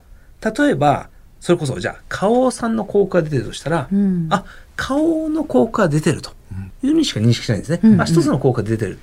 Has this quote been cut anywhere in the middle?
no; 0 cuts

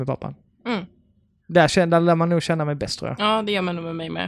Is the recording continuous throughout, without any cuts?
yes; 0 cuts

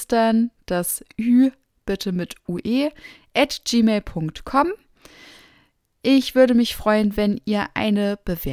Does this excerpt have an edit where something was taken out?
no; 0 cuts

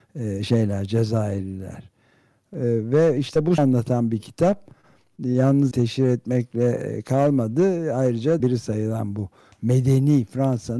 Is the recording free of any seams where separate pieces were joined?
no; 3 cuts; at 3.6 s, 5.7 s, 8.4 s

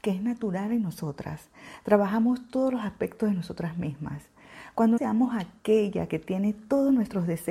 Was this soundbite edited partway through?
yes; 1 cut; at 5.0 s

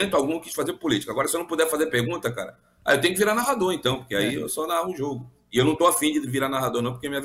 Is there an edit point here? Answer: no; 0 cuts

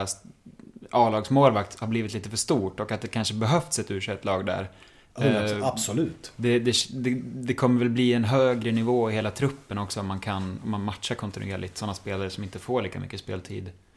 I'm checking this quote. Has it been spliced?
no; 0 cuts

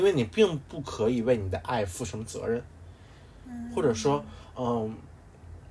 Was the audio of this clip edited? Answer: no; 0 cuts

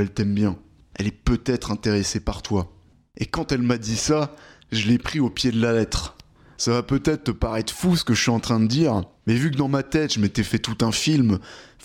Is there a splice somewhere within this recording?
no; 0 cuts

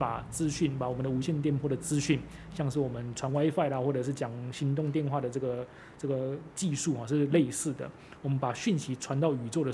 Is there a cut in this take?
no; 0 cuts

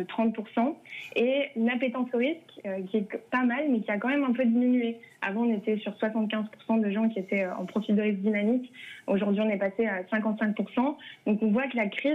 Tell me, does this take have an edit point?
no; 0 cuts

